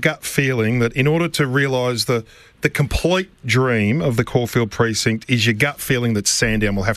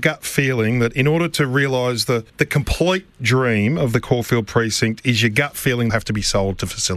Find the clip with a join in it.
second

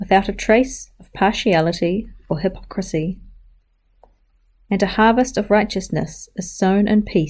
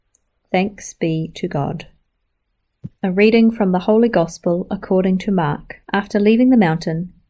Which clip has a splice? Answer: second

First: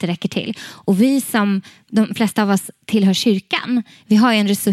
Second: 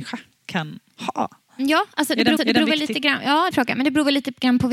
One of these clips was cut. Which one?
second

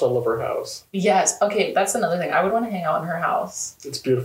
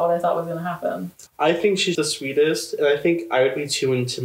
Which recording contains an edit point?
second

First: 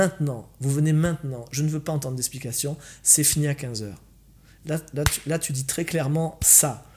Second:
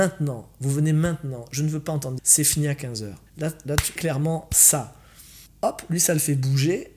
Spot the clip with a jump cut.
second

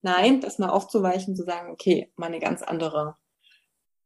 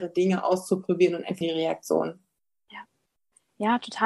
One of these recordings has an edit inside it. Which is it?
second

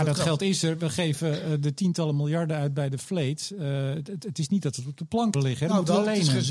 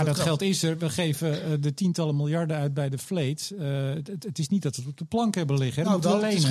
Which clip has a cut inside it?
first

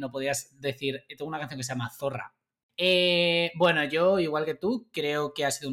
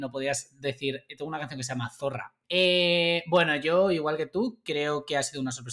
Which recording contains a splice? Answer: second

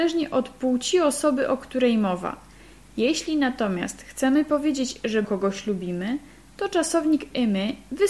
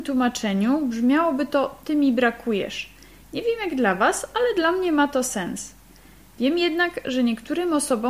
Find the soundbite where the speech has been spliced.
first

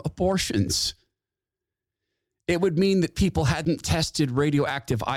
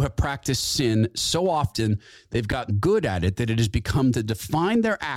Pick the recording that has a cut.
second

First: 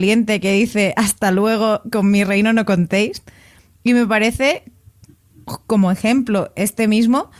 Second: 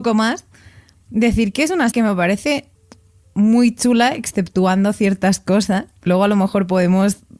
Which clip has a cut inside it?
second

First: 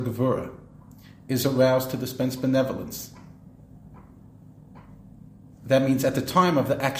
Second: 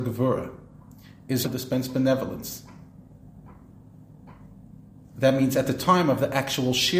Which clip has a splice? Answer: second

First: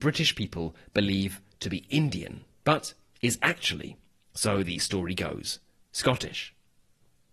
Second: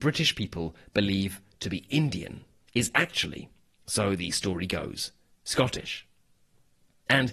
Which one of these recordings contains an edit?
second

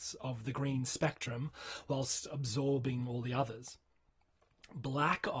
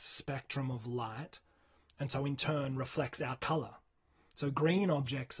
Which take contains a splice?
second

